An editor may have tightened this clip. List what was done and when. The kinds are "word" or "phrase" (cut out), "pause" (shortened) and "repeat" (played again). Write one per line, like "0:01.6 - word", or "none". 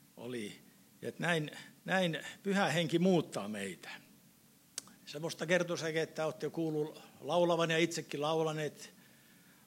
0:01.8 - pause